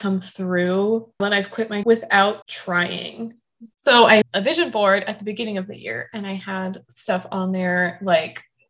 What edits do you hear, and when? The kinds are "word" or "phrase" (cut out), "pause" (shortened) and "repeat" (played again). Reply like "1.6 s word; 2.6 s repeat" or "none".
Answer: 1.2 s word; 1.8 s word; 2.4 s word; 4.2 s word